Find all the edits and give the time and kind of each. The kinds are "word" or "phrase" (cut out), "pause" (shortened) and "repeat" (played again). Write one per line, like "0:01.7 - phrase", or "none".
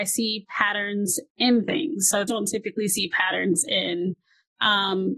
0:02.3 - phrase